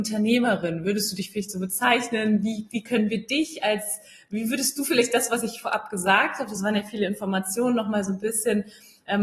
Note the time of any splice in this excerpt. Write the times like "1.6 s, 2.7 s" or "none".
none